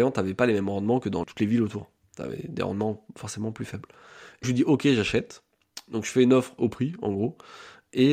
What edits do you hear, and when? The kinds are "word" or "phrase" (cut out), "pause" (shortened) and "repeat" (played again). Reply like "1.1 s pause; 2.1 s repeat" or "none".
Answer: 1.2 s word; 4.4 s word; 6.6 s word

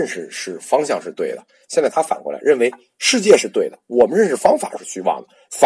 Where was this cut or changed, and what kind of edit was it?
none

